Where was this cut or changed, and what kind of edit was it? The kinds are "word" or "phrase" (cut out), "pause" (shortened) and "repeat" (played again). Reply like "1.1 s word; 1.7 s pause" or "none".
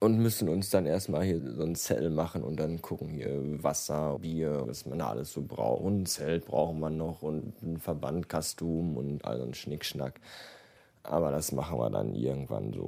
1.4 s word; 4.2 s word; 4.6 s word